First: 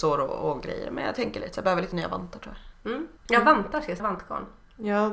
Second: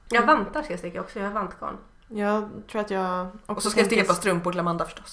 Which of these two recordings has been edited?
first; 2 cuts; at 3.2 s, 4.0 s

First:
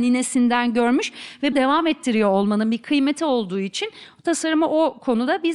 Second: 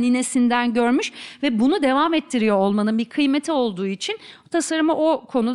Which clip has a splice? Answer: first; 1 cut; at 1.5 s

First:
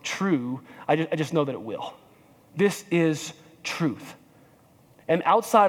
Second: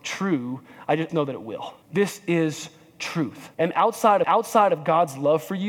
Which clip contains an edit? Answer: second; 4 cuts; at 1.1 s, 1.8 s, 3.5 s, 4.2 s

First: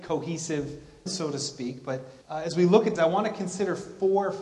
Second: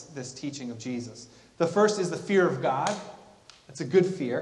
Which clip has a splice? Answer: first; 3 cuts; at 1.1 s, 2.2 s, 3.0 s

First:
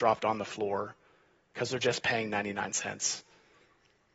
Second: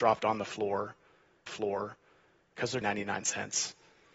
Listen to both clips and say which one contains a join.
second; 2 cuts; at 1.5 s, 2.8 s

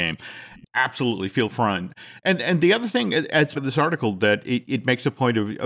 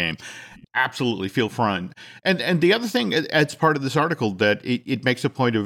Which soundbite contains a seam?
first; 1 cut; at 3.6 s

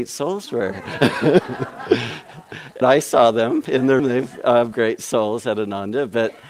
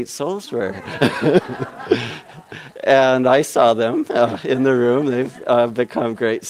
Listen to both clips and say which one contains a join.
first; 4 cuts; at 2.8 s, 3.7 s, 4.0 s, 4.7 s

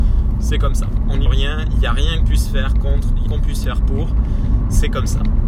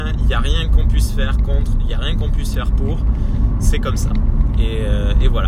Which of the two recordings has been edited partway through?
first; 3 cuts; at 1.3 s, 2.2 s, 3.3 s

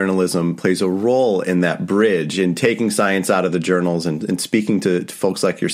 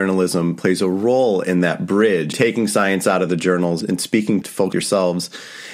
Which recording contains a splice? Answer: second; 4 cuts; at 2.3 s, 3.8 s, 4.4 s, 4.7 s

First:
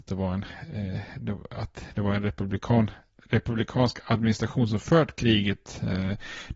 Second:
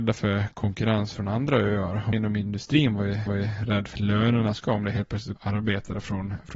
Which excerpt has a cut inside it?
second; 5 cuts; at 2.1 s, 3.3 s, 3.9 s, 4.6 s, 5.4 s

